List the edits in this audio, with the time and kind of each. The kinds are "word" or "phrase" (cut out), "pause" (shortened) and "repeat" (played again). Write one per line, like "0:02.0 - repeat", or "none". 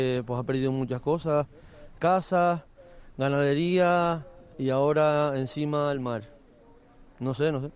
0:02.0 - word
0:04.5 - word